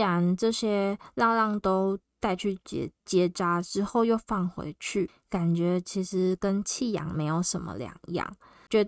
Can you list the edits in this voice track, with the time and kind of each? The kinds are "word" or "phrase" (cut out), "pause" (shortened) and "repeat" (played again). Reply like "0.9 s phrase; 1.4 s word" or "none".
3.0 s pause